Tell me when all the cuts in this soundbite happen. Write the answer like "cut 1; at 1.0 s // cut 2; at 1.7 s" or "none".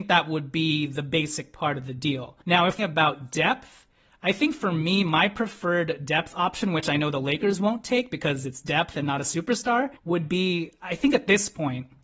cut 1; at 2.4 s // cut 2; at 2.8 s // cut 3; at 10.0 s